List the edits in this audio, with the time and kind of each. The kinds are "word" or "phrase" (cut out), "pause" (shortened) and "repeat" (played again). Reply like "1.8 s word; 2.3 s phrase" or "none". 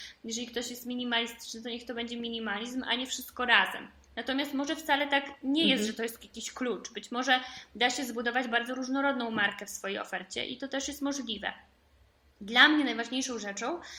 none